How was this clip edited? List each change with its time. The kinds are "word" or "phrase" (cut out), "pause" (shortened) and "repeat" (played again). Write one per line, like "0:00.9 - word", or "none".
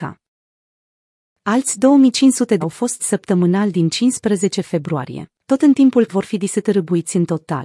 0:02.6 - word
0:03.0 - word
0:05.4 - pause
0:06.1 - word